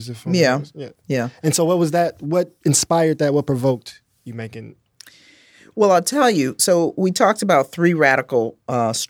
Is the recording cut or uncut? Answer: uncut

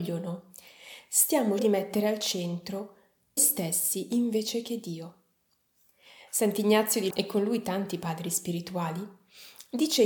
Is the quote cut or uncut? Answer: cut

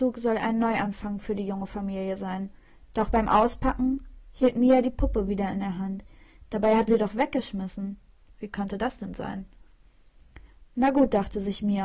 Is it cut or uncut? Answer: cut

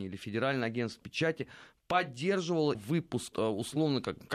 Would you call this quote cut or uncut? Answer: cut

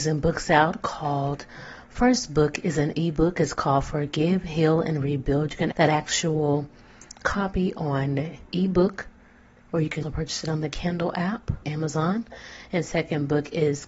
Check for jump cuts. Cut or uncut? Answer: cut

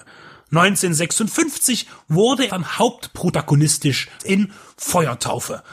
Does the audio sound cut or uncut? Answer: cut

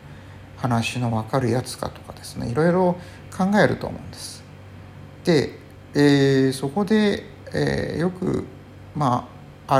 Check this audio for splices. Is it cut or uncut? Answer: uncut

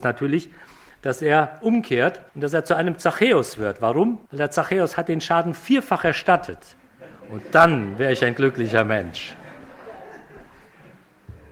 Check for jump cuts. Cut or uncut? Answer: cut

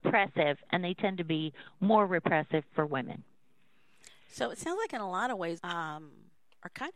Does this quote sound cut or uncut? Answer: cut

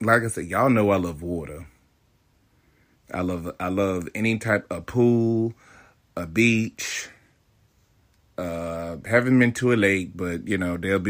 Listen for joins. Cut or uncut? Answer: uncut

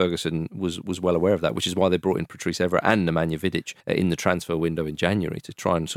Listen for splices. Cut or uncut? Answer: cut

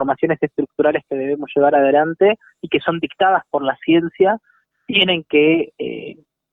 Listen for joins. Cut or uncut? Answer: uncut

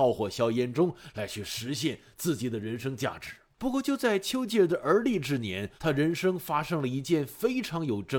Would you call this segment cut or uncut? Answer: cut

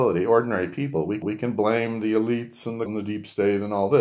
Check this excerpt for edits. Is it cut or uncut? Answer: cut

